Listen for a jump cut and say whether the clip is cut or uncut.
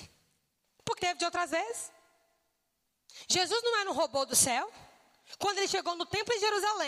cut